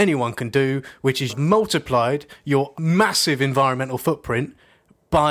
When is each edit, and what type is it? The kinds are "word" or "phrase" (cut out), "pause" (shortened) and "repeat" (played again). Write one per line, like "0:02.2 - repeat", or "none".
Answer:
0:01.3 - word
0:02.7 - word